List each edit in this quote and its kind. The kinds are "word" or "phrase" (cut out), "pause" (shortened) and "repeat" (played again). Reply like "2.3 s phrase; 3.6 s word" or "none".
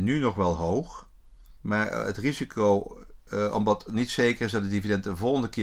1.5 s pause